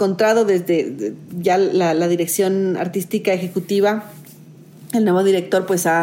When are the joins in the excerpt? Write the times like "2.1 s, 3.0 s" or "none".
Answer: none